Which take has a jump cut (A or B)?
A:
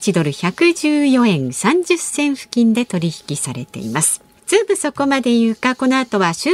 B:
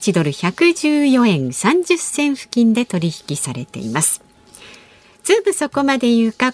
A